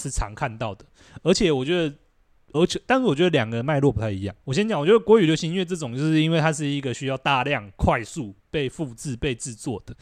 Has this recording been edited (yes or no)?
yes